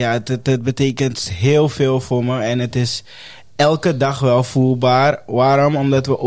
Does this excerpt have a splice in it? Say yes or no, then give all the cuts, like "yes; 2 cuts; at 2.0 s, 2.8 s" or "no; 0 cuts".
no; 0 cuts